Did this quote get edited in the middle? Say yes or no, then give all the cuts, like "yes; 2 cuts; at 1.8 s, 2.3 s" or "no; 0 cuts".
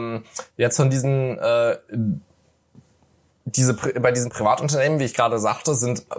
no; 0 cuts